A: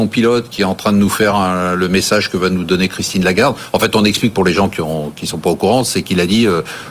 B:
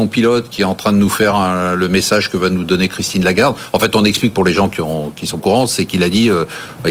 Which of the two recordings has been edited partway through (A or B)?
B